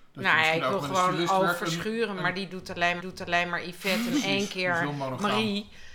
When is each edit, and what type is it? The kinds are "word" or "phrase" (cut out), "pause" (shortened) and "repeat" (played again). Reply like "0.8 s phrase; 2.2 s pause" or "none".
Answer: 3.0 s repeat